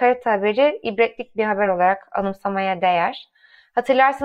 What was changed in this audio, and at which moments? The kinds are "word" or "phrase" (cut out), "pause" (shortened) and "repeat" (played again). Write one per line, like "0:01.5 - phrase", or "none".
none